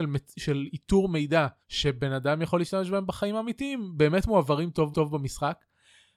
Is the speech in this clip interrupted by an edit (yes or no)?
yes